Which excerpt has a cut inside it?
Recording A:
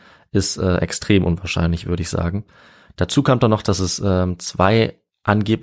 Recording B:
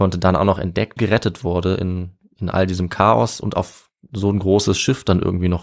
B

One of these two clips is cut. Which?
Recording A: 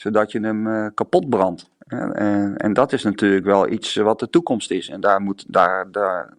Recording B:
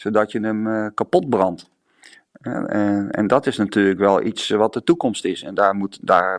A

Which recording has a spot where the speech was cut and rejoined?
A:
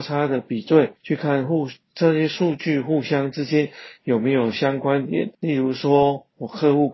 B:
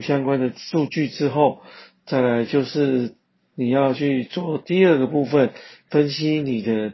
A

